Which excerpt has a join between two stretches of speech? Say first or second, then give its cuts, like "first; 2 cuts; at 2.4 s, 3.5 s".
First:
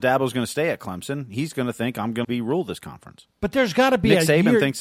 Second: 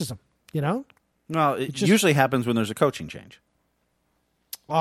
first; 1 cut; at 2.2 s